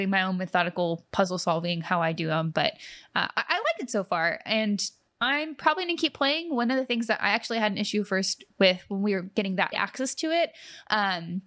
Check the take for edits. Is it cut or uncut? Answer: cut